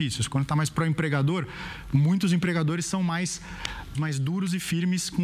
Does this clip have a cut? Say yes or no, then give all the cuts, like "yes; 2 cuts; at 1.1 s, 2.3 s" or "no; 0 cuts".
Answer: yes; 1 cut; at 3.9 s